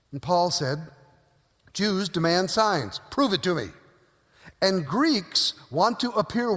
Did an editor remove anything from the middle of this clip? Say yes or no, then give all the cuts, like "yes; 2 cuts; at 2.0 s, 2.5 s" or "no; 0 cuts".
no; 0 cuts